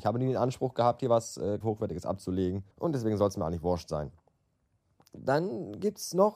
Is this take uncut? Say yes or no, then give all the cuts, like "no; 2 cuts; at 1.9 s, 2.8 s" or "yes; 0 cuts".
no; 2 cuts; at 1.6 s, 2.7 s